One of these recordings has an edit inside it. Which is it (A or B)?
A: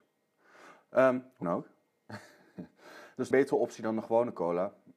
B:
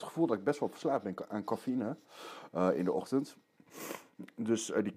A